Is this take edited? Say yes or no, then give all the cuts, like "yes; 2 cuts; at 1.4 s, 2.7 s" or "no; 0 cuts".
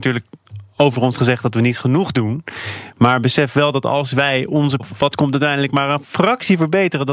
yes; 2 cuts; at 4.8 s, 5.1 s